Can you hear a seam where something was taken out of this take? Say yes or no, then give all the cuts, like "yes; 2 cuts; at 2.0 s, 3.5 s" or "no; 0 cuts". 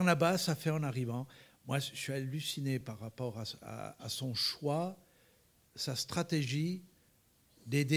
no; 0 cuts